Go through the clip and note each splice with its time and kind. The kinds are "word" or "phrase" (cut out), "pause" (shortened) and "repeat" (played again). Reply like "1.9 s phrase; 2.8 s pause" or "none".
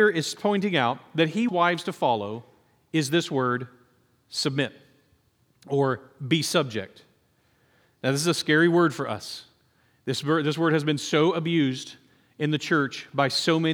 1.5 s word